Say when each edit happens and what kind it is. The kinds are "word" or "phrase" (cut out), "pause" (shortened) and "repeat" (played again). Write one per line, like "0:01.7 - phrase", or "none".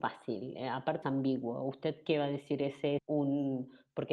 0:01.0 - word
0:03.0 - word